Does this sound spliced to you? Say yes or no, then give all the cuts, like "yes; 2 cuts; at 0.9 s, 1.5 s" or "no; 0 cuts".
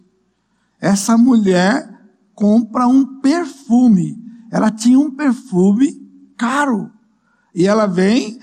no; 0 cuts